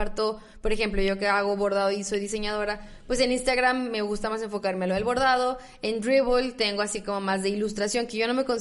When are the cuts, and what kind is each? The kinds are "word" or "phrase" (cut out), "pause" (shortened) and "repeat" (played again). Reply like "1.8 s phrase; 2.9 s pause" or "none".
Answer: none